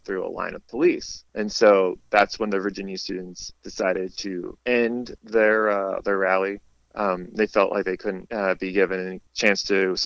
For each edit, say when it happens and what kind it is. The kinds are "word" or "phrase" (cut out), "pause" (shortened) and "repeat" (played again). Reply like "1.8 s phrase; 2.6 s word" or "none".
none